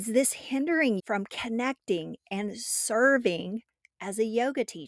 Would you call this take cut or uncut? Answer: cut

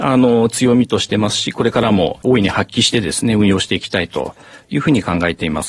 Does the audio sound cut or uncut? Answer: uncut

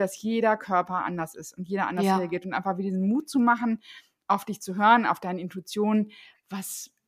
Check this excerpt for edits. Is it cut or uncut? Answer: uncut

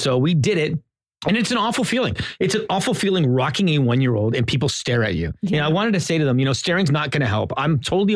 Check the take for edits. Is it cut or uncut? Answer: uncut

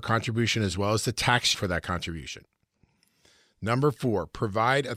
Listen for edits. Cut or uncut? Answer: cut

